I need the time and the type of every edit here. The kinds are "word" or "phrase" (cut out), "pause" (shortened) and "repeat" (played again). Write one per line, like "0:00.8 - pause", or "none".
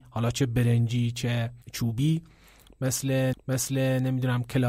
0:01.6 - pause
0:03.3 - repeat